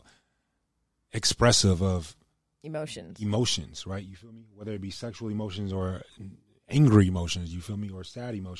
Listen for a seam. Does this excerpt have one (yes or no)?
no